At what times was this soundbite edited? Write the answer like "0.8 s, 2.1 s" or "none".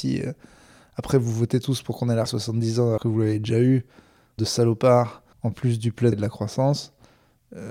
2.3 s, 3.0 s, 4.4 s, 5.3 s, 6.1 s